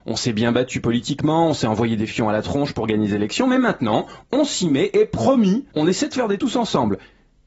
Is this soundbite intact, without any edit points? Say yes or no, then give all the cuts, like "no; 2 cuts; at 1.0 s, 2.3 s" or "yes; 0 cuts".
no; 2 cuts; at 5.7 s, 6.4 s